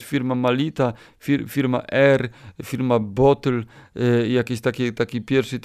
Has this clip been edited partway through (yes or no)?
no